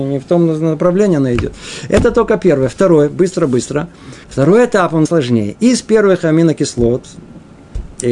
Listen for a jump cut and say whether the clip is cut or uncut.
cut